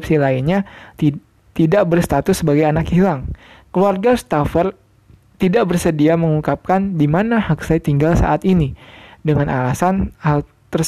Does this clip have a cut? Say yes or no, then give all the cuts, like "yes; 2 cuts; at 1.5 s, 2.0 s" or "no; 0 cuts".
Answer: no; 0 cuts